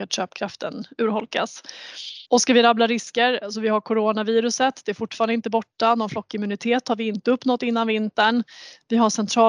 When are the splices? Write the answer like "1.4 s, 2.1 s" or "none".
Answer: 2.3 s